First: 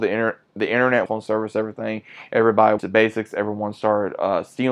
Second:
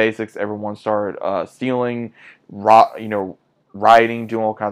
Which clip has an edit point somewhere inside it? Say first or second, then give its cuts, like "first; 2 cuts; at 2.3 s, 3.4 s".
first; 2 cuts; at 1.1 s, 2.8 s